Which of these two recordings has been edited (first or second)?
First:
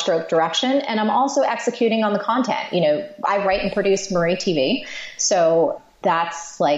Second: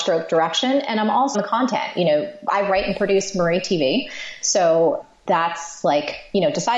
second